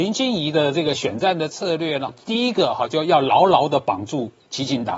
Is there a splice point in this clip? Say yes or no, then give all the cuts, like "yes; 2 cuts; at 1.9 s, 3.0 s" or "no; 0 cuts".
yes; 1 cut; at 2.1 s